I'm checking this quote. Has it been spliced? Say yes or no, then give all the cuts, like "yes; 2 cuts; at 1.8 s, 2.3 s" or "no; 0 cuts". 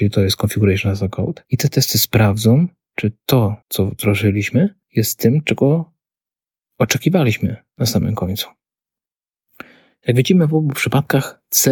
yes; 3 cuts; at 1.5 s, 3.6 s, 4.8 s